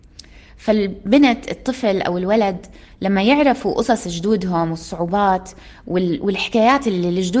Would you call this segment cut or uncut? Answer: uncut